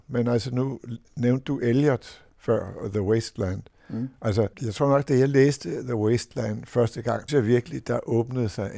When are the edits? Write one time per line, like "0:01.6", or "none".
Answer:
0:01.0
0:02.3
0:04.5
0:07.3